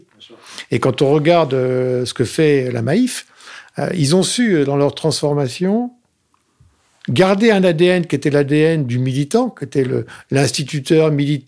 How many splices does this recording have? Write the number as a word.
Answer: zero